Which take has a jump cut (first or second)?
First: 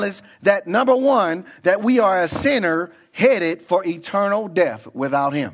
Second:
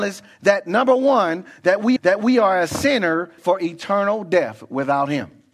second